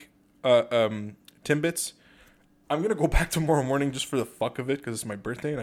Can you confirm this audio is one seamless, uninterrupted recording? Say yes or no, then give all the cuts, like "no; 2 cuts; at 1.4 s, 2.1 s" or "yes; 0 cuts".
yes; 0 cuts